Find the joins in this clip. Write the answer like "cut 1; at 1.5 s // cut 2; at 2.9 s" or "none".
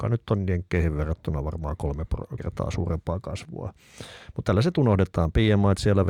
cut 1; at 2.4 s